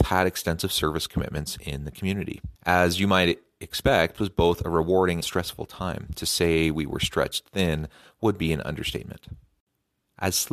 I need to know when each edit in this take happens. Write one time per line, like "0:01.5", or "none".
0:02.6
0:04.2
0:05.2